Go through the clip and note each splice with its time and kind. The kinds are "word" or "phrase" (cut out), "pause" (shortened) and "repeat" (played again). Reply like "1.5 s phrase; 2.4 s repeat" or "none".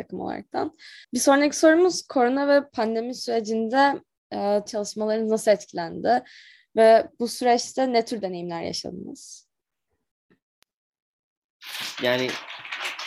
1.0 s pause; 4.7 s phrase